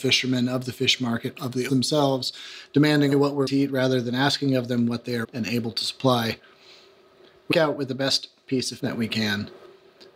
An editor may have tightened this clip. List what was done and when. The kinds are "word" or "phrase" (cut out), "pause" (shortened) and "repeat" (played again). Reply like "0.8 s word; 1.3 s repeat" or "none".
1.7 s word; 3.1 s word; 3.5 s word; 5.2 s word; 7.5 s word; 8.8 s word